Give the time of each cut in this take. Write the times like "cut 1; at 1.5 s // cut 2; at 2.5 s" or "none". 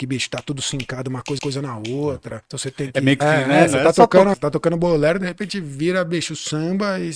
cut 1; at 1.4 s // cut 2; at 2.4 s // cut 3; at 3.2 s // cut 4; at 4.3 s